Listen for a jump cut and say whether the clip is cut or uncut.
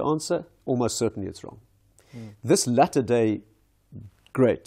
uncut